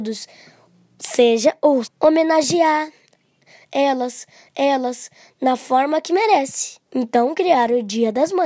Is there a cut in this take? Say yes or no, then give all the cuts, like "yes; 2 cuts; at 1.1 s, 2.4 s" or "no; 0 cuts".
yes; 3 cuts; at 1.8 s, 4.5 s, 6.9 s